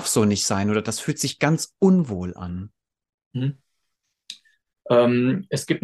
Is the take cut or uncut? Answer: uncut